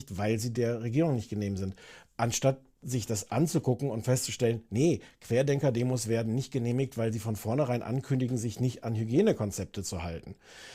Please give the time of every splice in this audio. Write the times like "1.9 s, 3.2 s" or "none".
none